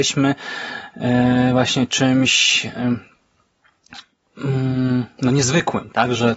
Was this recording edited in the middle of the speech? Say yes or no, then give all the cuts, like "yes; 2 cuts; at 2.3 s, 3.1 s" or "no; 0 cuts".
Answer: no; 0 cuts